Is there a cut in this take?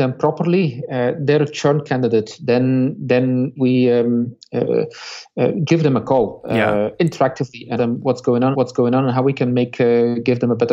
yes; 4 cuts; at 3.6 s, 5.7 s, 7.8 s, 8.5 s

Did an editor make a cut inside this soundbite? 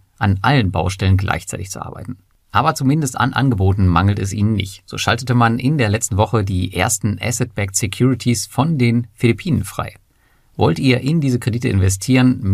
no; 0 cuts

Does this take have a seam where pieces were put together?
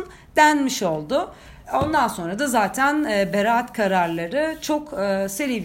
yes; 1 cut; at 1.6 s

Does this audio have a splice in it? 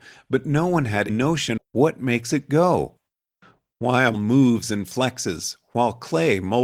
yes; 3 cuts; at 1.1 s, 1.6 s, 4.1 s

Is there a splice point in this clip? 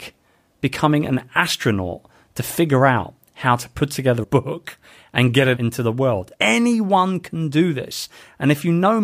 yes; 3 cuts; at 4.2 s, 5.6 s, 6.3 s

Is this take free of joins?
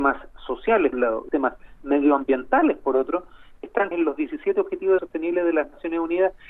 no; 4 cuts; at 0.9 s, 1.3 s, 3.9 s, 5.0 s

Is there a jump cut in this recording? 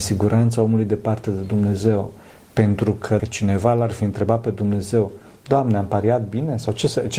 yes; 1 cut; at 3.2 s

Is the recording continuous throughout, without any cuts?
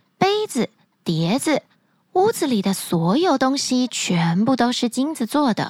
yes; 0 cuts

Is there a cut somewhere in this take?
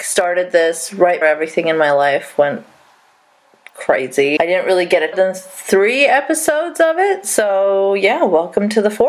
yes; 3 cuts; at 1.2 s, 4.4 s, 5.1 s

